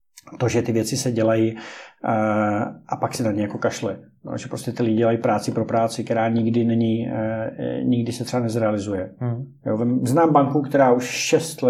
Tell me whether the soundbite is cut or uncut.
uncut